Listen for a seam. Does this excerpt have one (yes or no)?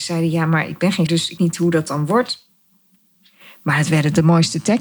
yes